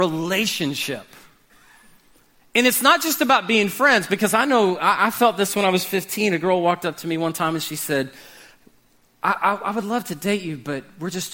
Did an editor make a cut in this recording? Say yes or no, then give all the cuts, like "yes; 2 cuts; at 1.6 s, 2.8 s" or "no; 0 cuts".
no; 0 cuts